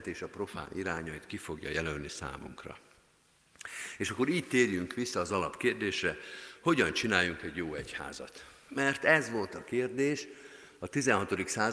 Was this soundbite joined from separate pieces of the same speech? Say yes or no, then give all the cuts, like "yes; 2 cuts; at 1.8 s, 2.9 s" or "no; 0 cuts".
no; 0 cuts